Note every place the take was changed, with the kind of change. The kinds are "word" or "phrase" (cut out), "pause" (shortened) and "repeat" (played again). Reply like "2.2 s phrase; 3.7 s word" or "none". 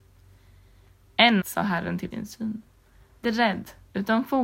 1.4 s word; 2.1 s word; 3.2 s word